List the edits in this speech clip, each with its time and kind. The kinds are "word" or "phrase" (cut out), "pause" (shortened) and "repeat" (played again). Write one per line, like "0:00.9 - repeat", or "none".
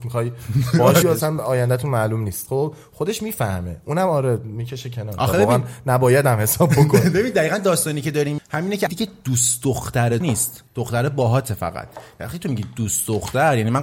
0:01.0 - phrase
0:08.4 - word
0:08.9 - phrase
0:10.2 - word
0:10.7 - pause